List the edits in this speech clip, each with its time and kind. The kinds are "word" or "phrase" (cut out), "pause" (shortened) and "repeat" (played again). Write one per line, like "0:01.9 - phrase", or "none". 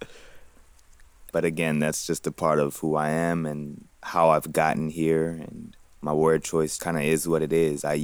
0:01.3 - word
0:03.9 - pause
0:06.8 - word